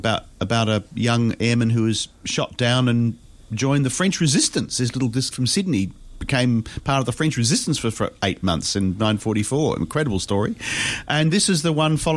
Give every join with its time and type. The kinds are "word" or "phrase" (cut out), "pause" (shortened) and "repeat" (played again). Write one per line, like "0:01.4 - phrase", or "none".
0:05.3 - word